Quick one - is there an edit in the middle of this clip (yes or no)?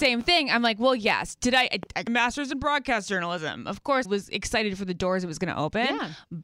yes